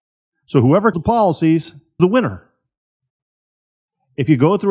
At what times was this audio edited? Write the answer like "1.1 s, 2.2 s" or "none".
0.9 s, 2.0 s

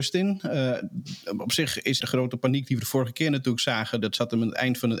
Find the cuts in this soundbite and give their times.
2.0 s

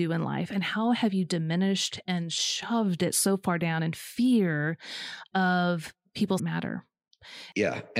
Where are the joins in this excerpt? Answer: 6.4 s

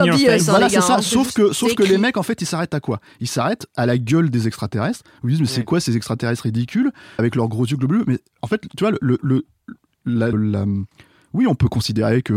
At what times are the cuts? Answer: 7.2 s, 10.3 s

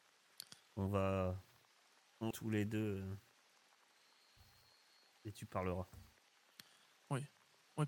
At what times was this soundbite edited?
2.3 s

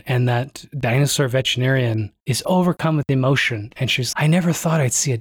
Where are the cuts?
2.2 s, 4.1 s

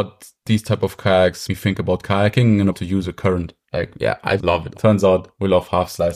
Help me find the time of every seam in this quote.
1.5 s, 2.7 s, 3.6 s, 4.4 s, 4.7 s

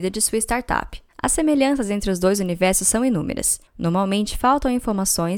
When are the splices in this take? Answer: 1.1 s, 3.7 s

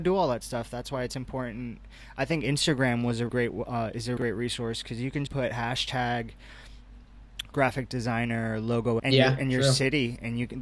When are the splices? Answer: 3.3 s, 4.2 s, 5.3 s, 7.5 s, 9.0 s

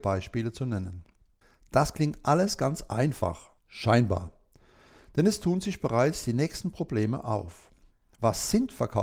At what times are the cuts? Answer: 1.4 s, 3.6 s

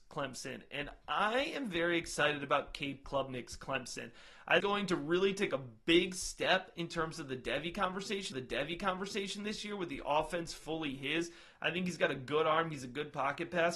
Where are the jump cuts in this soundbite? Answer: 4.6 s, 8.3 s

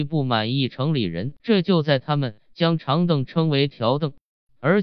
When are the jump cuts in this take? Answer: 1.4 s

